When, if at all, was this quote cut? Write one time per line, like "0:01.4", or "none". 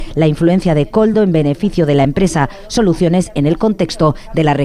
none